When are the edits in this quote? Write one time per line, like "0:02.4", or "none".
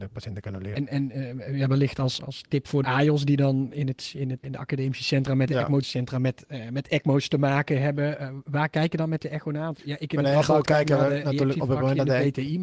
0:02.2
0:02.8
0:04.4
0:05.8